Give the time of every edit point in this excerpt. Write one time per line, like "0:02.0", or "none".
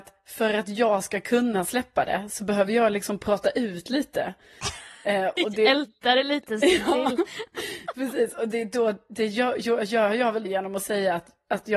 0:10.4